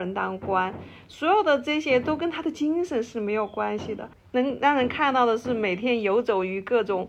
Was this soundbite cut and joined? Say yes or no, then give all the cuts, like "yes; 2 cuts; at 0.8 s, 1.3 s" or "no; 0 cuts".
no; 0 cuts